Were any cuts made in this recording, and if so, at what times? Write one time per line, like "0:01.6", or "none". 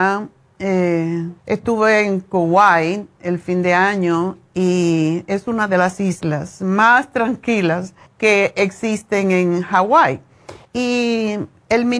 0:01.4
0:08.1
0:10.6